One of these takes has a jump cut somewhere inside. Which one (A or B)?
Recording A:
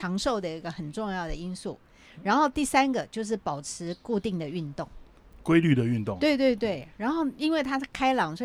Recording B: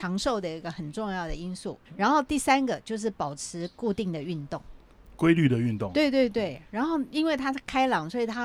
B